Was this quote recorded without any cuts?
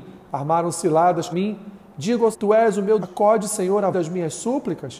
no; 4 cuts; at 1.3 s, 2.3 s, 3.0 s, 3.9 s

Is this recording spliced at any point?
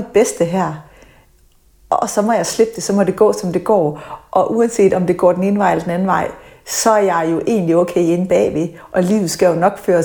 no; 0 cuts

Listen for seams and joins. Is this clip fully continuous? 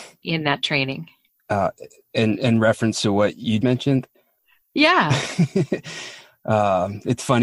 no; 1 cut; at 3.6 s

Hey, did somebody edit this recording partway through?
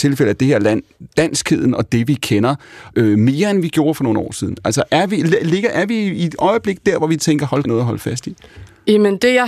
yes; 2 cuts; at 2.9 s, 7.6 s

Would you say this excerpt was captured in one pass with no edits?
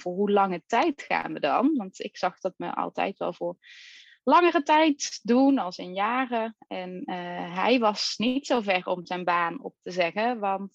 yes; 0 cuts

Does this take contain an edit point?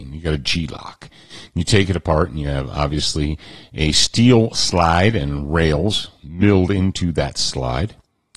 no; 0 cuts

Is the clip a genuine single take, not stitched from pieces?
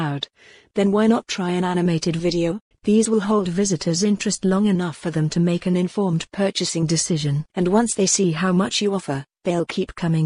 no; 2 cuts; at 2.7 s, 7.5 s

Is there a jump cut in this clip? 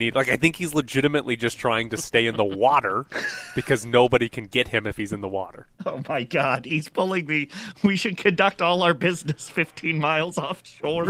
yes; 1 cut; at 5.7 s

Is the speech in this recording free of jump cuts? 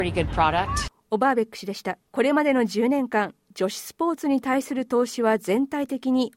no; 1 cut; at 2.1 s

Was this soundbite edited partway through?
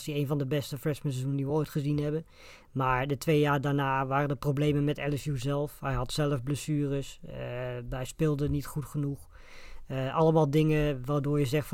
no; 0 cuts

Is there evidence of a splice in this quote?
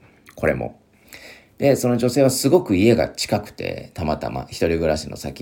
no; 0 cuts

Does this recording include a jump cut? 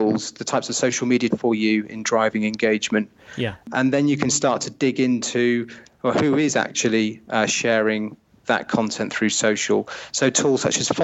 yes; 1 cut; at 1.3 s

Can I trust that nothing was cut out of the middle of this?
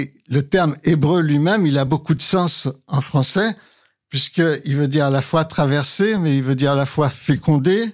yes; 0 cuts

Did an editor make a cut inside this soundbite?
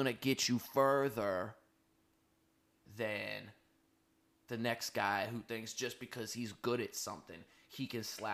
no; 0 cuts

